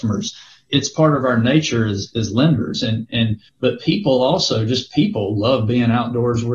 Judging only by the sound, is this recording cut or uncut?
cut